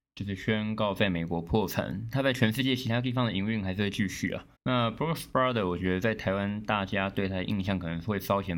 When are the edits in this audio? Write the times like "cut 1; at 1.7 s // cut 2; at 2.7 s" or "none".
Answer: cut 1; at 4.6 s